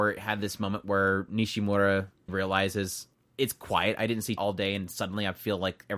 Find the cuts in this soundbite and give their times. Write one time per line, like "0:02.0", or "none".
0:02.3
0:03.1
0:04.4